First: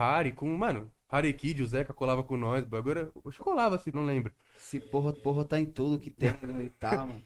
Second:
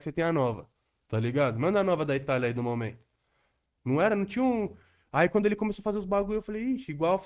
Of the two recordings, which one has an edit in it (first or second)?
first